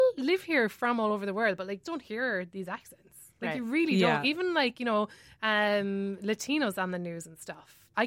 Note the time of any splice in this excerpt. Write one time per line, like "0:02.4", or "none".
0:01.8